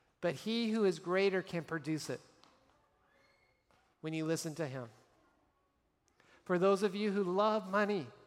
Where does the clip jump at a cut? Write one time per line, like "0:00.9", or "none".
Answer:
none